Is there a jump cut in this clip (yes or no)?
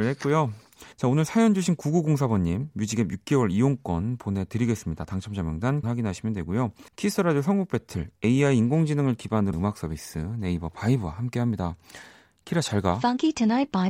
yes